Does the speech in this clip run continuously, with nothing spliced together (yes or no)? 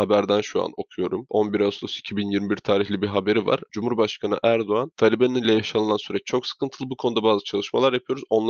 yes